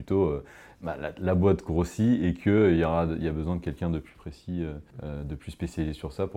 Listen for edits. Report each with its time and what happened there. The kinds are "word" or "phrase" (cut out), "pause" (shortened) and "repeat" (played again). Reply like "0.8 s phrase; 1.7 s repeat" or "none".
4.9 s pause